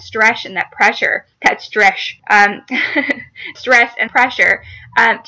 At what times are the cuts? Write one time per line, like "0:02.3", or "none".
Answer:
0:01.3
0:02.2
0:03.5
0:04.1